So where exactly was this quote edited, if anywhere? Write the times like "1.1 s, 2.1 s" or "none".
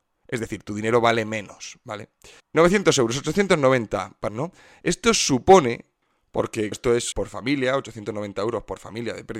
2.4 s, 4.3 s, 6.7 s, 7.1 s